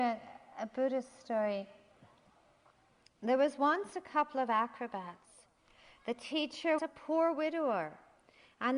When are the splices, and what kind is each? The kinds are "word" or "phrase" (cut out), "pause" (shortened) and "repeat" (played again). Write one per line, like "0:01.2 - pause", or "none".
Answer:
0:06.8 - word